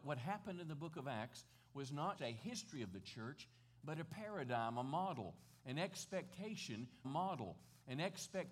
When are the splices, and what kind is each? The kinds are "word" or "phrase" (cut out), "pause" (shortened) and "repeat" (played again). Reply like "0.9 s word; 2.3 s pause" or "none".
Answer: 2.2 s word; 7.0 s repeat